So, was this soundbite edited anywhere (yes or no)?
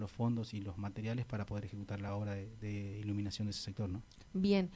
no